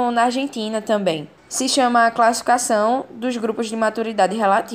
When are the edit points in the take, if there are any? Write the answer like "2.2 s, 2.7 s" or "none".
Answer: 1.4 s